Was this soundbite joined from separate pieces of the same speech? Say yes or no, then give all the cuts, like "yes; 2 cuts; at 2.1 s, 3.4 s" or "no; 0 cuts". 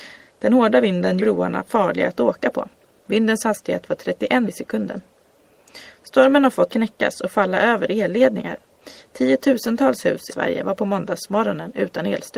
yes; 4 cuts; at 1.2 s, 4.4 s, 6.7 s, 10.3 s